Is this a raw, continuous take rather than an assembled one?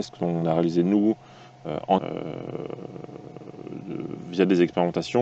no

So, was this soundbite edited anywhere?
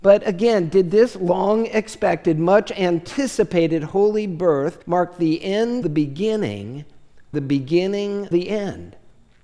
yes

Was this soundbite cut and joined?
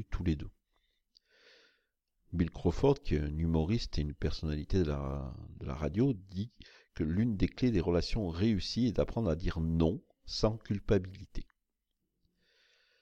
no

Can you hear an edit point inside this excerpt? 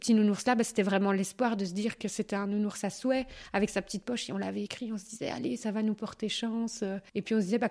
no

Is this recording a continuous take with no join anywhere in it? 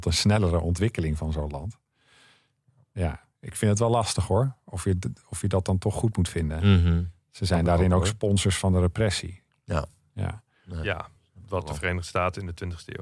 yes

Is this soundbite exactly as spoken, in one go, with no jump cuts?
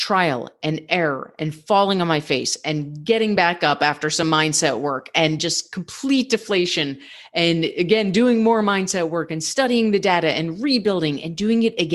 yes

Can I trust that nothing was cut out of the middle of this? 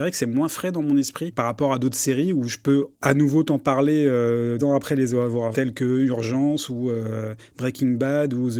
no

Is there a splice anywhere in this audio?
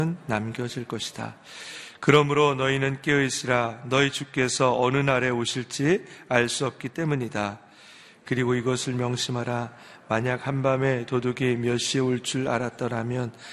no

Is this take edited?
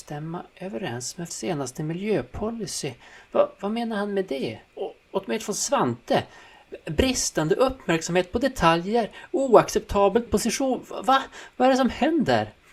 yes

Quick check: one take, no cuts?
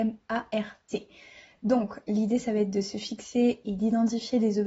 yes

